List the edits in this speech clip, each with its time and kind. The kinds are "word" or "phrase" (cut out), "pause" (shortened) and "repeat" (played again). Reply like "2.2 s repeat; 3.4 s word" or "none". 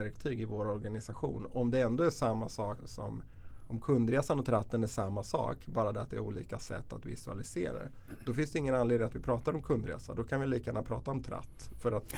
2.8 s word